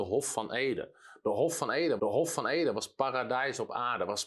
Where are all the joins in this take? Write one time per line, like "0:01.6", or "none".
0:02.0